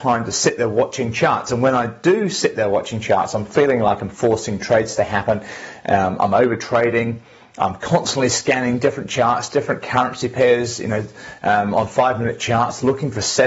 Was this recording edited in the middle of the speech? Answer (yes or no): no